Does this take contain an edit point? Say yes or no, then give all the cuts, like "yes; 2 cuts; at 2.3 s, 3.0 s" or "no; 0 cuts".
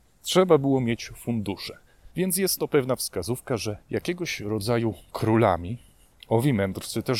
yes; 2 cuts; at 2.1 s, 3.8 s